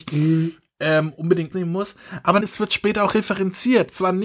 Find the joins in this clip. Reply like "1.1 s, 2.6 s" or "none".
1.5 s, 2.4 s